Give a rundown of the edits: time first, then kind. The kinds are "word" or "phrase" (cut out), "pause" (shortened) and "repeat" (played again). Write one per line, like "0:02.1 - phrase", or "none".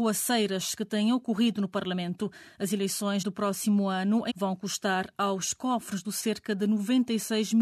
0:03.2 - word
0:04.3 - word
0:06.0 - word